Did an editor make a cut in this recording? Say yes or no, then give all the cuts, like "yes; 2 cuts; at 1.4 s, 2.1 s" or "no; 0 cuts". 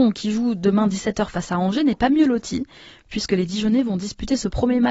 no; 0 cuts